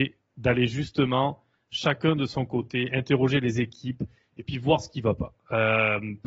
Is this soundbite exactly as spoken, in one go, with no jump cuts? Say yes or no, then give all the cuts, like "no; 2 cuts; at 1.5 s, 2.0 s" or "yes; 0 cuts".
yes; 0 cuts